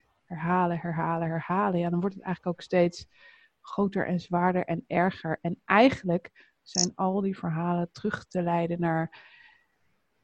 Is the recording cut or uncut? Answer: uncut